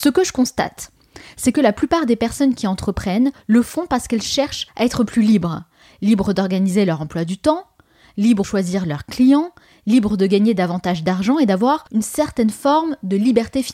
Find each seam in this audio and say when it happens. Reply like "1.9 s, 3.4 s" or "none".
4.7 s, 8.4 s, 11.9 s